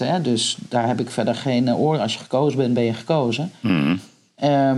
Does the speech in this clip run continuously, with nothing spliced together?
yes; 0 cuts

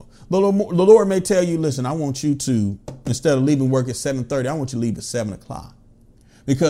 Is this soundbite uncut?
yes; 0 cuts

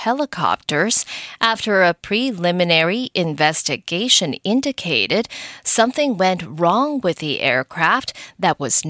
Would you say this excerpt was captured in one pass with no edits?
yes; 0 cuts

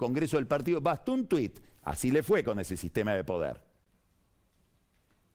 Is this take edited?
no; 0 cuts

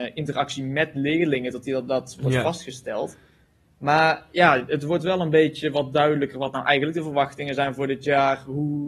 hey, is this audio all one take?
yes; 0 cuts

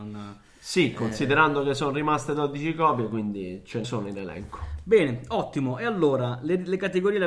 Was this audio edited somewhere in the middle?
yes; 1 cut; at 3.8 s

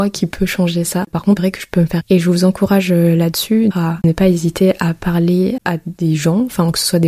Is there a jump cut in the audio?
yes; 4 cuts; at 1.4 s, 2.0 s, 3.7 s, 5.6 s

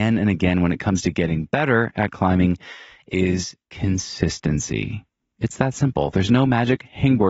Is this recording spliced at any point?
no; 0 cuts

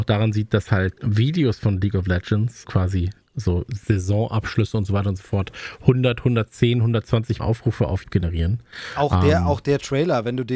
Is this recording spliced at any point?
yes; 4 cuts; at 1.0 s, 2.6 s, 7.4 s, 8.0 s

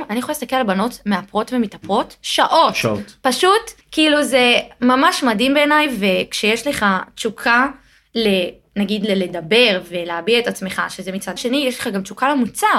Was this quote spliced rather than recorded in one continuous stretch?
yes; 2 cuts; at 3.8 s, 11.4 s

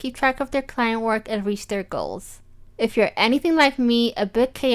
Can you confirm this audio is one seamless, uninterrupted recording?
yes; 0 cuts

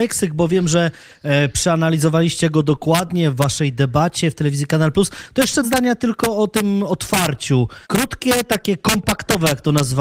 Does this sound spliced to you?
yes; 2 cuts; at 5.6 s, 7.8 s

